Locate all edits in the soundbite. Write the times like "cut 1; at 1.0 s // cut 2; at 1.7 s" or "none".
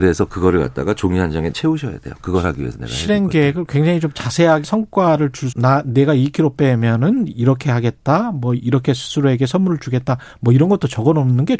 cut 1; at 1.5 s // cut 2; at 4.6 s // cut 3; at 5.5 s